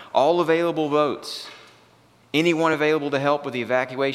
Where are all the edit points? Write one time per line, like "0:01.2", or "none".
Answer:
none